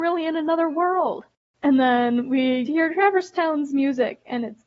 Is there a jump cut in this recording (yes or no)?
yes